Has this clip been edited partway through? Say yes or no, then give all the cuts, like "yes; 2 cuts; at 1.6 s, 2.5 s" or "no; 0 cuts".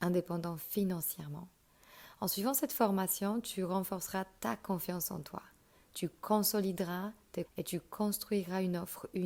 yes; 1 cut; at 7.5 s